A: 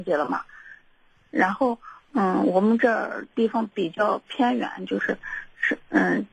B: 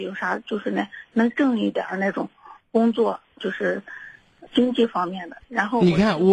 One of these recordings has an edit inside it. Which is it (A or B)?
B